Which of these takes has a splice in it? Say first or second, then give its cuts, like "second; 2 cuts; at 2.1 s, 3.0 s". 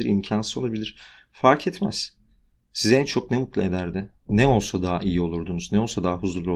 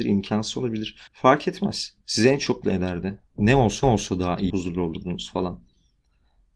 second; 5 cuts; at 1.1 s, 2.0 s, 2.6 s, 3.8 s, 4.5 s